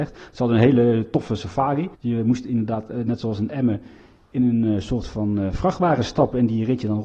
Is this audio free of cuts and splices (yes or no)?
no